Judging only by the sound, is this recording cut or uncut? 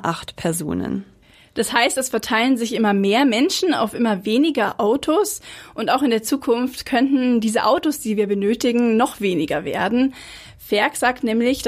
uncut